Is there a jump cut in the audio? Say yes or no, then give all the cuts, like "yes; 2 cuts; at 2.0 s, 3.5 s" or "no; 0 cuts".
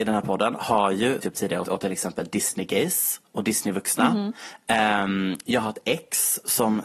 yes; 3 cuts; at 1.2 s, 1.6 s, 3.2 s